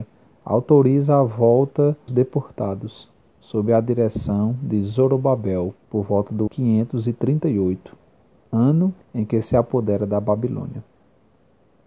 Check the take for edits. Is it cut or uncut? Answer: cut